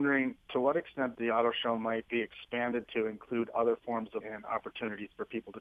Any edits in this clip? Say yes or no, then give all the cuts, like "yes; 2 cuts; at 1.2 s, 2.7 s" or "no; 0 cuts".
yes; 1 cut; at 4.2 s